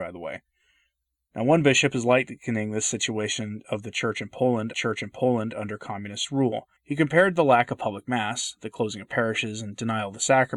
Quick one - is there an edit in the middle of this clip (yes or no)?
yes